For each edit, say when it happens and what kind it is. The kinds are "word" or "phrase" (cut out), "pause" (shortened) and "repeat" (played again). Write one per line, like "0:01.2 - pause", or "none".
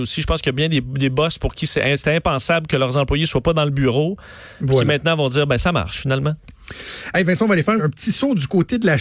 0:07.8 - word